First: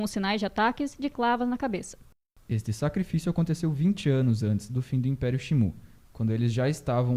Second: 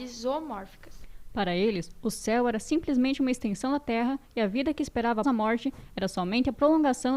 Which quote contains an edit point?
second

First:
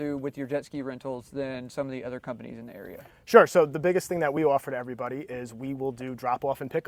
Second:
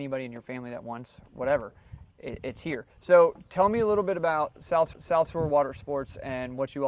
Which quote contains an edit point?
second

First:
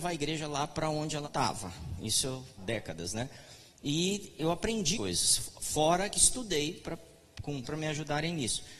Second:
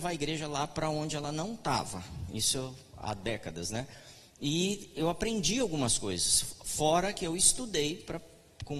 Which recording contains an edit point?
first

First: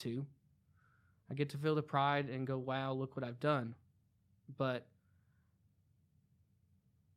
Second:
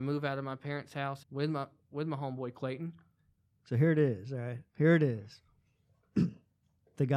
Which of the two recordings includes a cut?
second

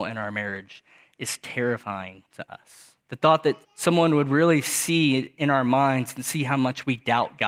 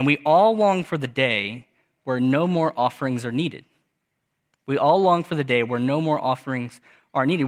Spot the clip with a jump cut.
first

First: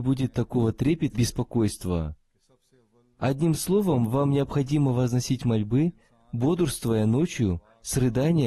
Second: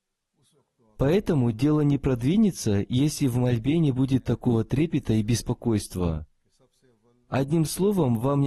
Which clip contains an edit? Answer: first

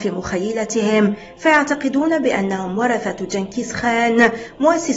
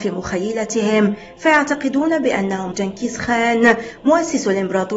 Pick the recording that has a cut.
second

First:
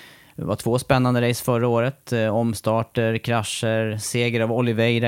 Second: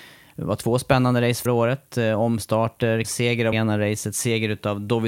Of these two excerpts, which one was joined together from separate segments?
second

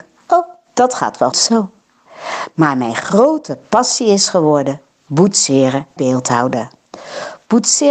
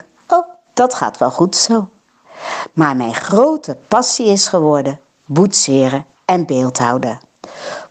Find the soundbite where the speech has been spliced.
first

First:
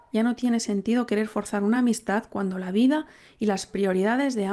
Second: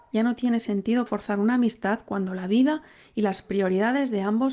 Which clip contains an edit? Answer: second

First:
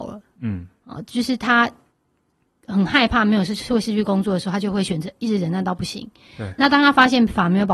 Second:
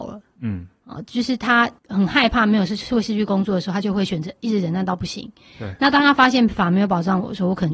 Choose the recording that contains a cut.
second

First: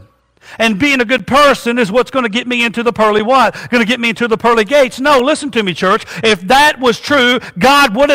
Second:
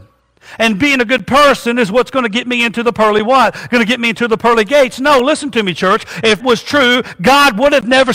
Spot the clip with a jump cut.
second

